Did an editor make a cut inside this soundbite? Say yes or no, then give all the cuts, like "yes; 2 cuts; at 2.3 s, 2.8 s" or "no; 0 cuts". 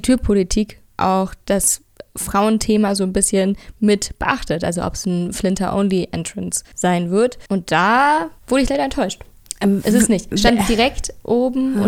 yes; 3 cuts; at 6.7 s, 7.5 s, 8.4 s